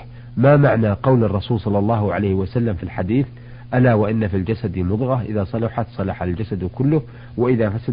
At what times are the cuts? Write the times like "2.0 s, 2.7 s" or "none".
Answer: none